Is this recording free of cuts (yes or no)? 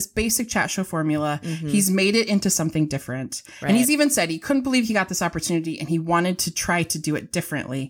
yes